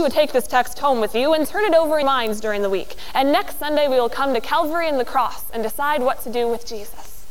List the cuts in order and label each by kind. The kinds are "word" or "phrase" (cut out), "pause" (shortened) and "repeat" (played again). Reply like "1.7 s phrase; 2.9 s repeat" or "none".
2.0 s word